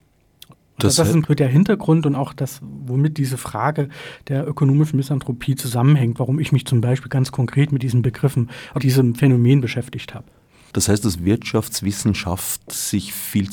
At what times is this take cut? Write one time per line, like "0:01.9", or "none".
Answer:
0:01.2
0:08.8